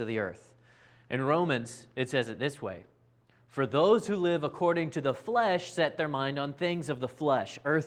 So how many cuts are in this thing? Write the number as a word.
zero